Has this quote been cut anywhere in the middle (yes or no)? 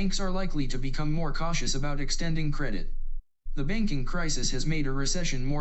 no